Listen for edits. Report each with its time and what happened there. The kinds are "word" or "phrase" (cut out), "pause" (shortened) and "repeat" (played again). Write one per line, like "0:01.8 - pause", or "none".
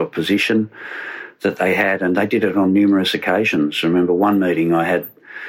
none